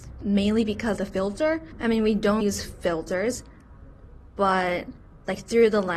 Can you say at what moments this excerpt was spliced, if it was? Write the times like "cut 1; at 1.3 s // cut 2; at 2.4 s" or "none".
cut 1; at 1.0 s // cut 2; at 2.4 s